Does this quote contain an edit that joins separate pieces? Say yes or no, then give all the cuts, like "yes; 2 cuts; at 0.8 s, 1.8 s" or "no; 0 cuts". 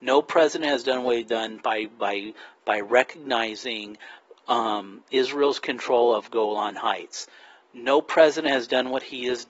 no; 0 cuts